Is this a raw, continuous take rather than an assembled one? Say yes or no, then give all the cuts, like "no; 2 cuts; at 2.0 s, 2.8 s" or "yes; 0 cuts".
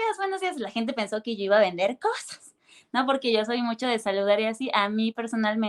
yes; 0 cuts